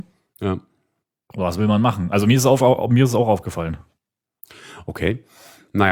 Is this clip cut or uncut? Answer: uncut